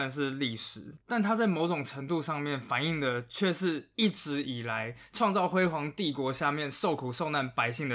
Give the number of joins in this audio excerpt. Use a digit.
1